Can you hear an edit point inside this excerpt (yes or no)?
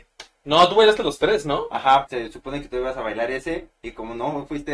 yes